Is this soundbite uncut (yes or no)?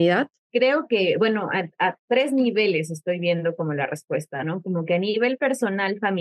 yes